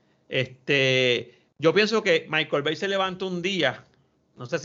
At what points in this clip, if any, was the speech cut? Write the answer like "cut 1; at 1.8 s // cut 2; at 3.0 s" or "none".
cut 1; at 1.5 s